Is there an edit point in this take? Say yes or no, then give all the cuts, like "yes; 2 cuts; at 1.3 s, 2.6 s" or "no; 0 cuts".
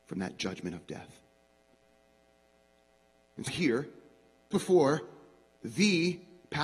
yes; 2 cuts; at 3.5 s, 4.5 s